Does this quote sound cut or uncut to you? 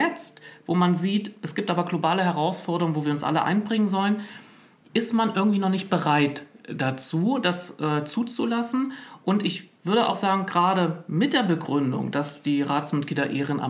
uncut